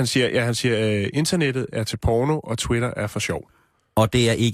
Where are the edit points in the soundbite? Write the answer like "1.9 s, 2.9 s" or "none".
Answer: none